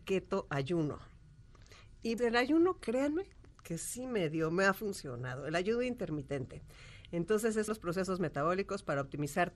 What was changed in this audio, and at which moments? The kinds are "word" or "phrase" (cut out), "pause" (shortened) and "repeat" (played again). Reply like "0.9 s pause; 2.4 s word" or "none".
2.2 s word; 7.7 s word